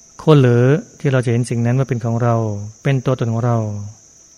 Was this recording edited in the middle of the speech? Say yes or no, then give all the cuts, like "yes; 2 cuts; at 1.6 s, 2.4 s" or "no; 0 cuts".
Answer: no; 0 cuts